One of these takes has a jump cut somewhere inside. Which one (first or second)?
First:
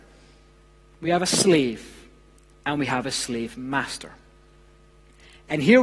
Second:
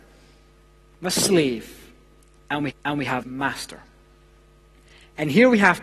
second